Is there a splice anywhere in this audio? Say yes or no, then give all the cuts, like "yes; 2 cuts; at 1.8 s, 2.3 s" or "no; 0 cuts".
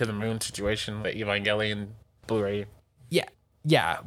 yes; 2 cuts; at 1.0 s, 2.2 s